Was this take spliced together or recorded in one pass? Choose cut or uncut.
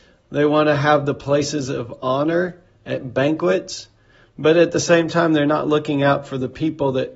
uncut